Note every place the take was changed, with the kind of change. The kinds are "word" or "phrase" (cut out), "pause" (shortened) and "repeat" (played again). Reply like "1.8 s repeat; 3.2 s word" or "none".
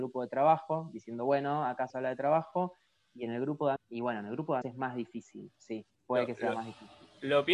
1.9 s word; 3.8 s word; 4.6 s word; 5.9 s pause